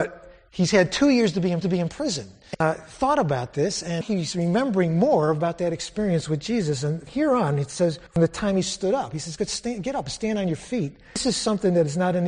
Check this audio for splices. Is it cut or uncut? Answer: cut